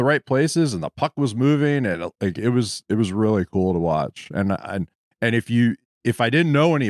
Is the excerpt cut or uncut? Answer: uncut